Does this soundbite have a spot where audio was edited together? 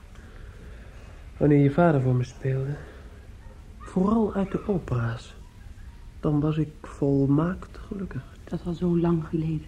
no; 0 cuts

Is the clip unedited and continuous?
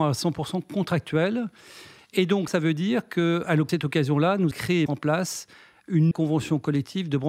no; 5 cuts; at 2.5 s, 3.7 s, 4.5 s, 4.9 s, 6.1 s

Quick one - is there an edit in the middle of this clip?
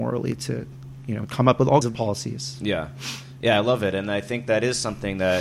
yes; 2 cuts; at 1.3 s, 1.8 s

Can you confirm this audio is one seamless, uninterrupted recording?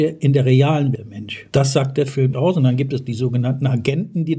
no; 2 cuts; at 1.0 s, 2.3 s

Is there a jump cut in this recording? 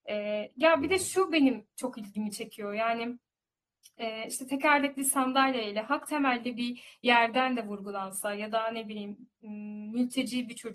no; 0 cuts

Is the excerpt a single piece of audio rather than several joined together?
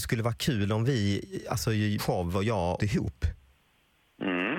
no; 2 cuts; at 2.0 s, 2.8 s

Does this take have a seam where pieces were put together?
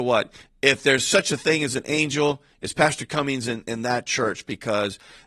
no; 0 cuts

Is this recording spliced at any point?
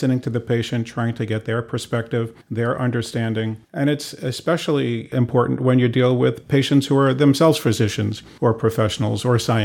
yes; 3 cuts; at 2.4 s, 3.6 s, 8.4 s

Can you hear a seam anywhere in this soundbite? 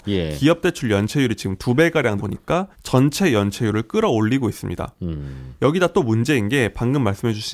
yes; 2 cuts; at 2.2 s, 2.7 s

